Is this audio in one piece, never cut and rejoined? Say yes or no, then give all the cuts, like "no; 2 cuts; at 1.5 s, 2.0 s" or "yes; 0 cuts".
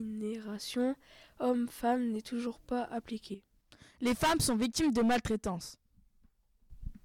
yes; 0 cuts